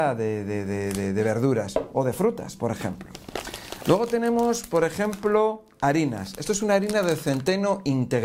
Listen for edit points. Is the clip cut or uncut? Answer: uncut